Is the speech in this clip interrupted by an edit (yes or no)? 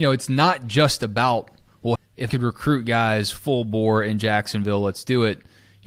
yes